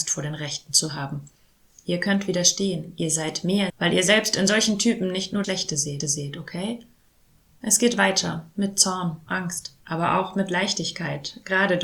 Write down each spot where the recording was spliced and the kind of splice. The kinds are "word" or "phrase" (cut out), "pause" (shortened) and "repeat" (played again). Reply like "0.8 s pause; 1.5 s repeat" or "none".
3.7 s word; 5.4 s word; 6.0 s repeat; 9.3 s word; 9.8 s pause